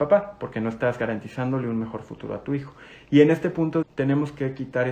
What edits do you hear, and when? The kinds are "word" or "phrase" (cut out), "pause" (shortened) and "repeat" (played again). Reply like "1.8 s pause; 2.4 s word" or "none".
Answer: 3.8 s word